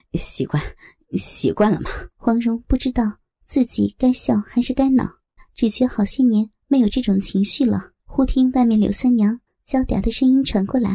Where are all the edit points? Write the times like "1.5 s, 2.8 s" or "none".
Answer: 2.1 s, 5.4 s, 8.0 s, 9.5 s